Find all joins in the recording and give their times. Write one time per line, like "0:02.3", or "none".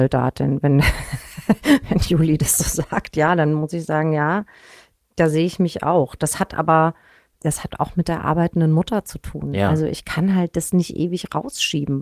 0:07.2